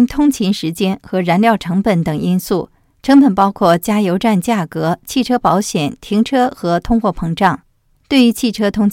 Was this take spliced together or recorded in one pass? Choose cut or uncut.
uncut